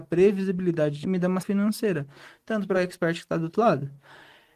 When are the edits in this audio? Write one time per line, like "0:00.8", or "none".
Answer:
0:01.0
0:01.4
0:02.7